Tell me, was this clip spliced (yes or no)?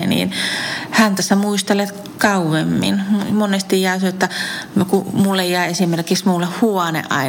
no